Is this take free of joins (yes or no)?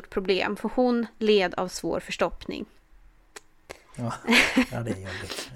yes